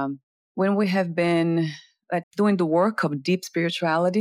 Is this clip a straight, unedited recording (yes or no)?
no